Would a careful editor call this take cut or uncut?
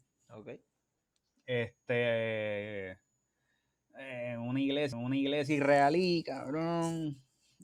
cut